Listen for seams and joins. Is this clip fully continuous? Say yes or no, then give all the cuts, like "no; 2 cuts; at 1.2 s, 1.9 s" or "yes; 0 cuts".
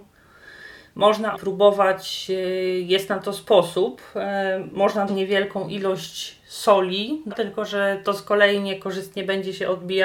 no; 3 cuts; at 1.3 s, 5.1 s, 7.3 s